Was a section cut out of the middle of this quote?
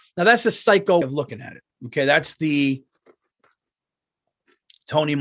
yes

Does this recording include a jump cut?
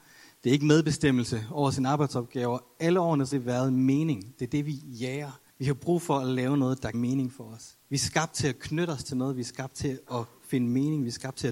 yes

